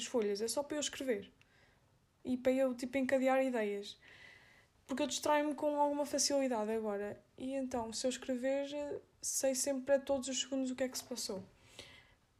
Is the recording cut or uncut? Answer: uncut